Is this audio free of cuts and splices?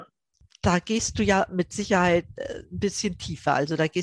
yes; 0 cuts

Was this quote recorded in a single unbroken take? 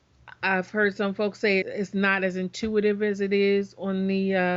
no; 1 cut; at 1.6 s

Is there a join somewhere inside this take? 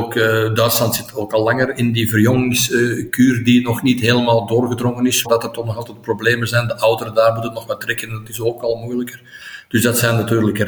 yes; 1 cut; at 5.2 s

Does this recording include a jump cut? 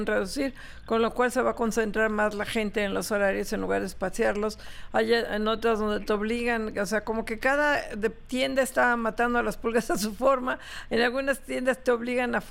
no; 0 cuts

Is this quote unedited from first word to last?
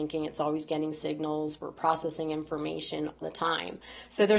no; 1 cut; at 3.2 s

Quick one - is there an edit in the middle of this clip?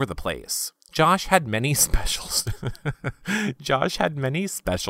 no; 0 cuts

